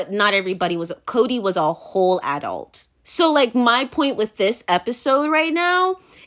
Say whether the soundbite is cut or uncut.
cut